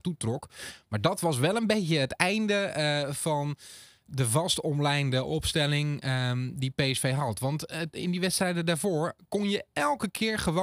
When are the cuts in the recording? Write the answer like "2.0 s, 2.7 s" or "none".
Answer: none